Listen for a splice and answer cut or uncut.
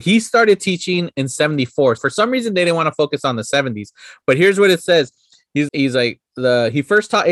cut